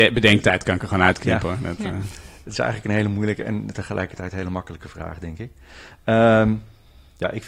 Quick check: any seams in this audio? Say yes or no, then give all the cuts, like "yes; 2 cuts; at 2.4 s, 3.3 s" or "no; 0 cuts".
no; 0 cuts